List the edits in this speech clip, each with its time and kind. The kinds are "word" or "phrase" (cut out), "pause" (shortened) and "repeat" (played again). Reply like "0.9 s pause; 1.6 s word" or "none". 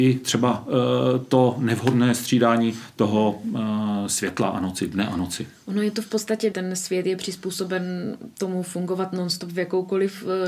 6.5 s phrase